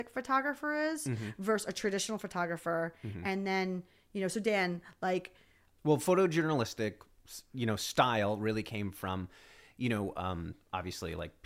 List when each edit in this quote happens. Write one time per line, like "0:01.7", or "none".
none